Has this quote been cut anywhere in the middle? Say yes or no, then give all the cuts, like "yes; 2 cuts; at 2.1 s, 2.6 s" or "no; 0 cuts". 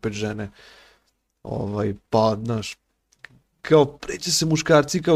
no; 0 cuts